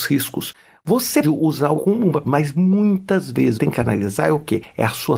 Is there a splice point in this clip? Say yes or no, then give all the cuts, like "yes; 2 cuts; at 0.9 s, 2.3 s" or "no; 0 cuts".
yes; 4 cuts; at 1.2 s, 1.8 s, 2.2 s, 3.6 s